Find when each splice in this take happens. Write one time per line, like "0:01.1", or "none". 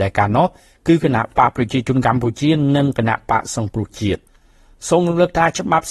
none